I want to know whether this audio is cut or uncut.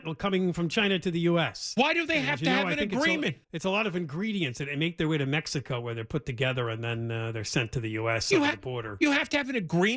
cut